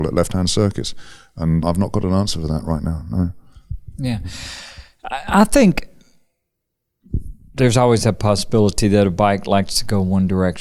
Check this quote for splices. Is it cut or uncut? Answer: cut